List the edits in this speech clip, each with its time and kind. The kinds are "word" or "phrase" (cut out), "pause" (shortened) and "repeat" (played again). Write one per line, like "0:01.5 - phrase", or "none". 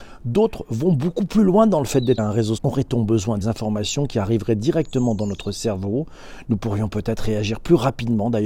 0:02.2 - word
0:02.6 - word
0:03.4 - phrase